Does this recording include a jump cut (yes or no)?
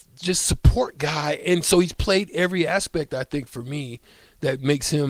no